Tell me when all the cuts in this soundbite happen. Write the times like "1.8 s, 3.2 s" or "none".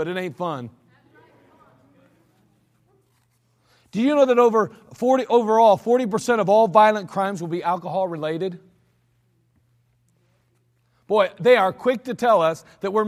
none